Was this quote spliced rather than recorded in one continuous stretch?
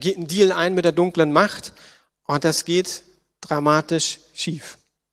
no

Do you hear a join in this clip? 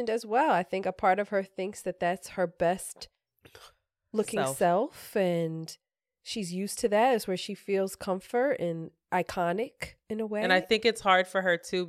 no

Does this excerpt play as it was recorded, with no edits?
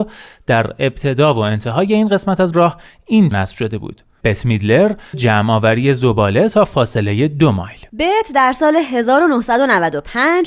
no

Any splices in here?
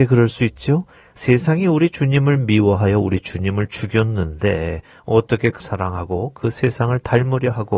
yes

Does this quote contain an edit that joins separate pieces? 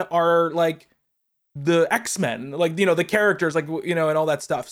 no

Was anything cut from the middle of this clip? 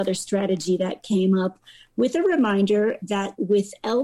no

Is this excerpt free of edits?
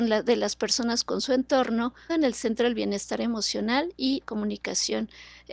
no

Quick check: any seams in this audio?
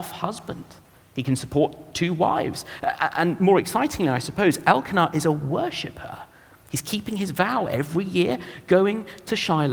no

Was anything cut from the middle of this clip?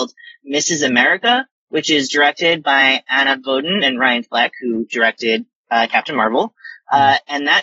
no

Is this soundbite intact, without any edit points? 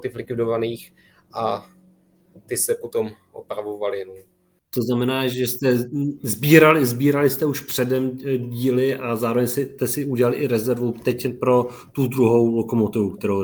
yes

